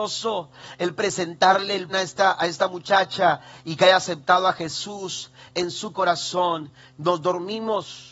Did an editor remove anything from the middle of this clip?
yes; 2 cuts; at 1.0 s, 1.9 s

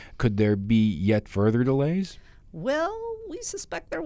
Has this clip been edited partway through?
no; 0 cuts

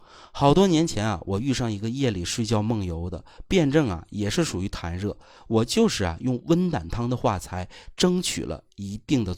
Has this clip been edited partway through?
no; 0 cuts

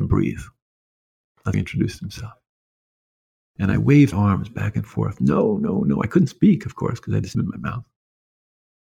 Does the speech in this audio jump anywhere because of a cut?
yes; 3 cuts; at 1.5 s, 4.1 s, 7.3 s

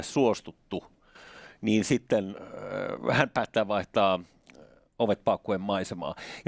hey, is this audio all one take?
yes; 0 cuts

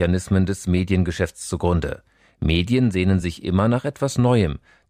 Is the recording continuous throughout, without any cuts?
yes; 0 cuts

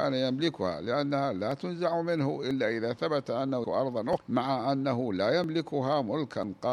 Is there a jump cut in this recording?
yes; 2 cuts; at 3.6 s, 4.2 s

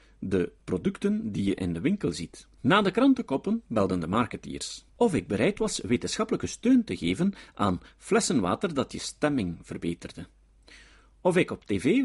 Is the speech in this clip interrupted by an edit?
yes; 2 cuts; at 2.5 s, 4.9 s

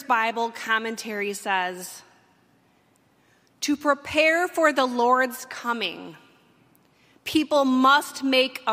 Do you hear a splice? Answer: no; 0 cuts

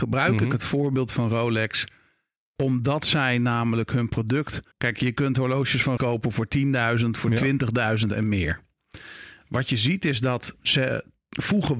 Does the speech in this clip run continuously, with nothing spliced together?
no; 3 cuts; at 4.7 s, 6.0 s, 10.6 s

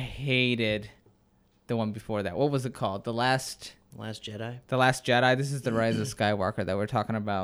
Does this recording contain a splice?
no; 0 cuts

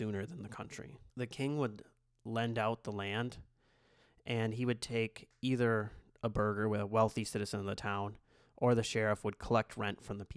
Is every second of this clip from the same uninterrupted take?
no; 1 cut; at 1.1 s

